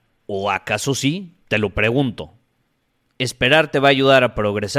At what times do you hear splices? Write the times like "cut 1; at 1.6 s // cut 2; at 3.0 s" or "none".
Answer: cut 1; at 1.4 s

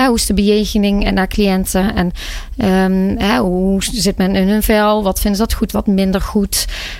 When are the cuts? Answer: cut 1; at 5.7 s

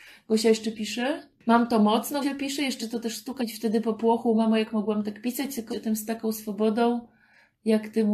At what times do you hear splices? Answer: cut 1; at 2.2 s // cut 2; at 2.8 s // cut 3; at 3.4 s // cut 4; at 5.7 s

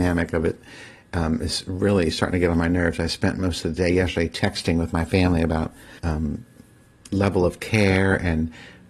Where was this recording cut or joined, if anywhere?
cut 1; at 6.0 s

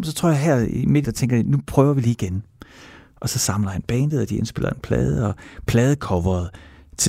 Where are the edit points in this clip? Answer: cut 1; at 1.0 s

